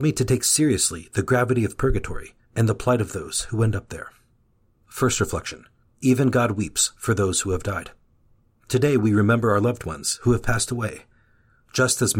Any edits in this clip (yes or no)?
yes